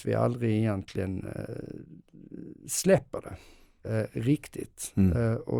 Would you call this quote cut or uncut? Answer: uncut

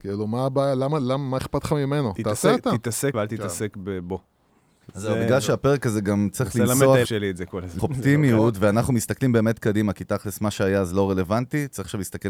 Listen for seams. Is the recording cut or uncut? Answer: cut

